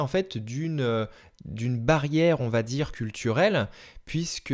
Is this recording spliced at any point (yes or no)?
no